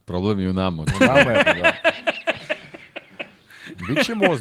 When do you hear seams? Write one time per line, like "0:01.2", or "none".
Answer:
0:01.4

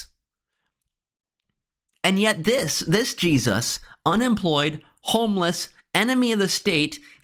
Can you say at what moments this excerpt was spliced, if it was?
none

